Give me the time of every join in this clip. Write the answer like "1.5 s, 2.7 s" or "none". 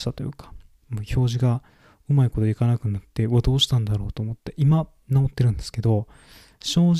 none